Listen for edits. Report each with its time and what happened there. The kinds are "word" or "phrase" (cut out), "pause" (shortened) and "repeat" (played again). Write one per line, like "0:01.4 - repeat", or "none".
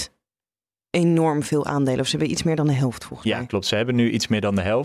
none